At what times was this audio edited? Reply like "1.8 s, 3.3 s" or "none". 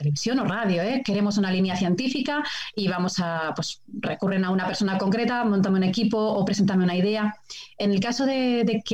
none